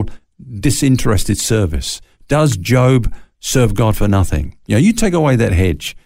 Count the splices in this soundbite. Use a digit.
0